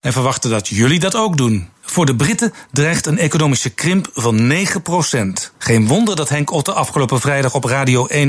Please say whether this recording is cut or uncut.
cut